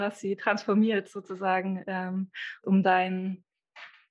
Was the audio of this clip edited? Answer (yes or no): no